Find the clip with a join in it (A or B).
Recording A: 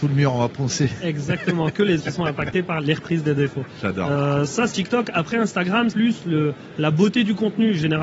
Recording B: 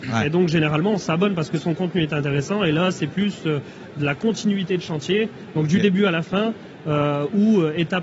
A